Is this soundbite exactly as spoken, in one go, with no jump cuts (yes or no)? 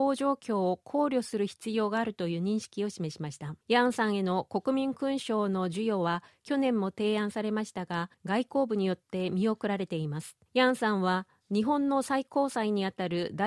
no